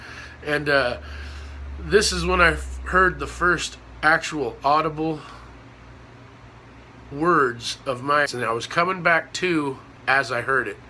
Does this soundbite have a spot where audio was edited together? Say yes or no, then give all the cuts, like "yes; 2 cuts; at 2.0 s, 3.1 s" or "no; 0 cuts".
yes; 3 cuts; at 7.1 s, 8.3 s, 10.0 s